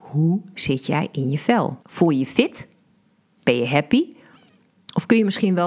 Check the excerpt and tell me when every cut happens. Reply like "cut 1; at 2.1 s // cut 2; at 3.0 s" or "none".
cut 1; at 1.8 s